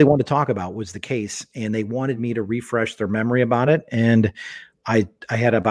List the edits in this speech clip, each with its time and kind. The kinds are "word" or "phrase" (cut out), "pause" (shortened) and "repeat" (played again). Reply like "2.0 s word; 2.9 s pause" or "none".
none